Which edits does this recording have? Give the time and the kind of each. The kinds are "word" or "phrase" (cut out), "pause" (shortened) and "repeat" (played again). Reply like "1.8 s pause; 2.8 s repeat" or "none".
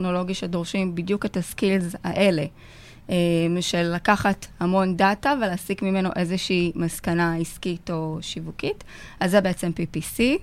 none

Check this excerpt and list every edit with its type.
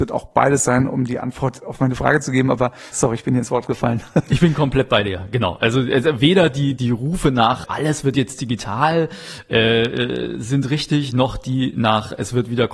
2.9 s word; 6.8 s word; 7.6 s word

